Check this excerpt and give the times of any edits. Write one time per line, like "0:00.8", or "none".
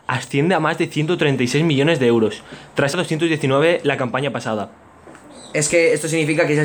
0:02.9